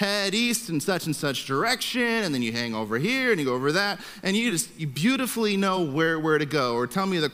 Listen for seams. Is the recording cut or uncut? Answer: uncut